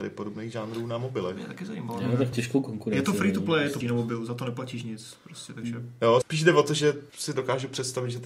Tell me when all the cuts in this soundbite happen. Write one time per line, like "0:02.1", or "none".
0:02.3
0:03.8
0:06.2
0:07.1